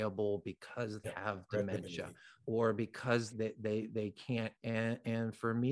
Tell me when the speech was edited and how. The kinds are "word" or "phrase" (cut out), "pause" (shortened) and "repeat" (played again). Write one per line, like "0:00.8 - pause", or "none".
0:01.0 - word
0:03.3 - word
0:04.6 - word